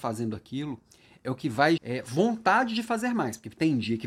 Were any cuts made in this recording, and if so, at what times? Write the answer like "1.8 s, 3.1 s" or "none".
1.8 s